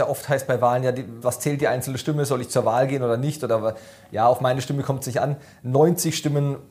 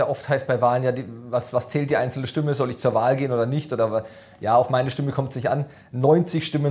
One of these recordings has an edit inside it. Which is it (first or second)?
first